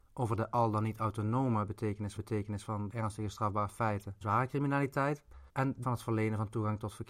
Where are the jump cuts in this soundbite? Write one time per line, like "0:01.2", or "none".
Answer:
0:02.2
0:02.9
0:04.2
0:05.5
0:05.8